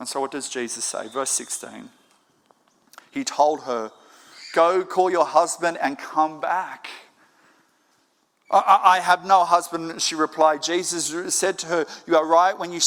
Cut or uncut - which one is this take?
uncut